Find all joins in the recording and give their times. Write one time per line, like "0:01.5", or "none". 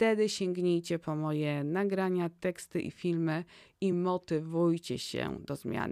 none